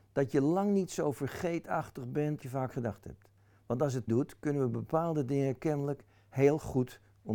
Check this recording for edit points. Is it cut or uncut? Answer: cut